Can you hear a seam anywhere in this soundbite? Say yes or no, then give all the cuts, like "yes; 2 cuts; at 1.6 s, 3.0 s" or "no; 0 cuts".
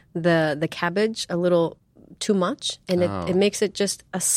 no; 0 cuts